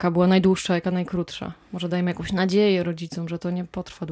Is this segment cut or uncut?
uncut